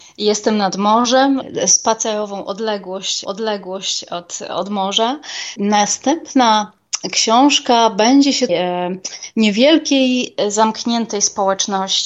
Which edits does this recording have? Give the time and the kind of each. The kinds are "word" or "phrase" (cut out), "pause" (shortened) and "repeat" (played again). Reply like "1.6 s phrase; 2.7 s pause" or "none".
3.2 s repeat; 8.5 s phrase